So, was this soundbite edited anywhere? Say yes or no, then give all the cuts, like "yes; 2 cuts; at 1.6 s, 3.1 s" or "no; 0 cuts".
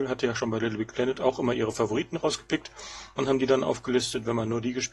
no; 0 cuts